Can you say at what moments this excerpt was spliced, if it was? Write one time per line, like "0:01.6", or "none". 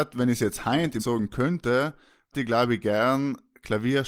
0:01.0
0:02.3